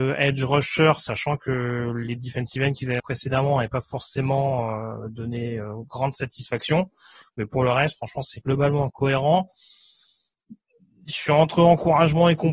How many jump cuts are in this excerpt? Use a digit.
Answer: 1